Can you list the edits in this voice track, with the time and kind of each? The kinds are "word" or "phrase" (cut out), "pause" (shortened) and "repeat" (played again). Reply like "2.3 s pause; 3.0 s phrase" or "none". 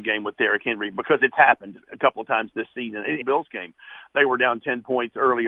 3.2 s phrase